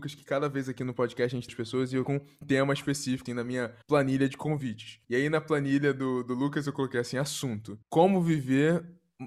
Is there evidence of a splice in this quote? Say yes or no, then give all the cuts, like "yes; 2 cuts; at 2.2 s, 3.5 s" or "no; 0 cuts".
yes; 7 cuts; at 1.5 s, 2.1 s, 2.4 s, 3.3 s, 3.8 s, 5.0 s, 7.8 s